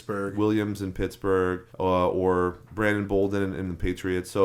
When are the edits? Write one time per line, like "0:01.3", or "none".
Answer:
0:01.7